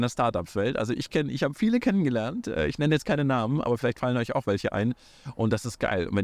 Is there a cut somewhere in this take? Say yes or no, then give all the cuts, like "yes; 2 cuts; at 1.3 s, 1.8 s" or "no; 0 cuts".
no; 0 cuts